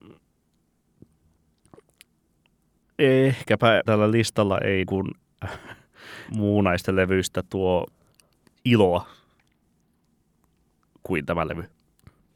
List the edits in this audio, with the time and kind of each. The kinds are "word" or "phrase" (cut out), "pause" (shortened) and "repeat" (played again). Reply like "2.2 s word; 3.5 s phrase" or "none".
3.9 s word; 4.9 s word; 6.3 s word; 8.6 s word